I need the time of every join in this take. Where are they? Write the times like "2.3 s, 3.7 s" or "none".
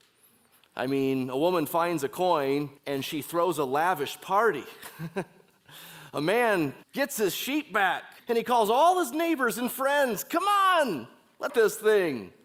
2.8 s, 6.8 s, 8.2 s, 11.5 s